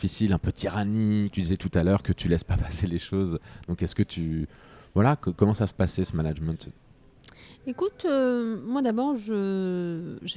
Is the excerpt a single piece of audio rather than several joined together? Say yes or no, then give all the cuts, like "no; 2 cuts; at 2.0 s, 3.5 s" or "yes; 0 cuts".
no; 1 cut; at 1.3 s